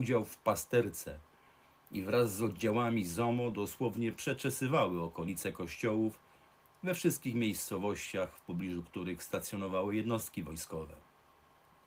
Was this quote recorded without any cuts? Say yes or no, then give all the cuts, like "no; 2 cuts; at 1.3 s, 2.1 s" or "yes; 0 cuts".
yes; 0 cuts